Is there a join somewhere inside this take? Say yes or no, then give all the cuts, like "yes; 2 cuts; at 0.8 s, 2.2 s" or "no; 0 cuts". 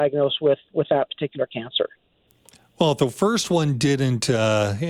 no; 0 cuts